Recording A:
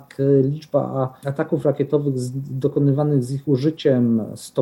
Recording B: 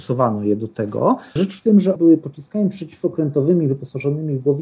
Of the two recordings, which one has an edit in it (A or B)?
B